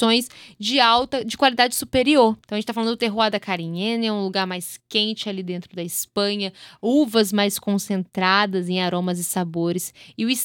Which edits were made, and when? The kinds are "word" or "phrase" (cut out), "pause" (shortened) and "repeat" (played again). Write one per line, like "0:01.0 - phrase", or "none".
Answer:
0:02.4 - pause